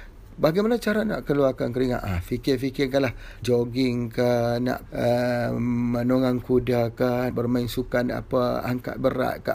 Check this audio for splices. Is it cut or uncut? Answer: cut